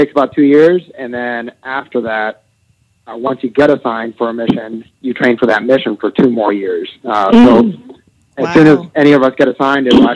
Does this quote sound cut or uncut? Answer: cut